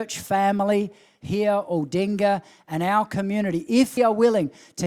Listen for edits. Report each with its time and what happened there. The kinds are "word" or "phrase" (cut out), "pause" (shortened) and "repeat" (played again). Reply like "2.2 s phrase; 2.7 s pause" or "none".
4.0 s word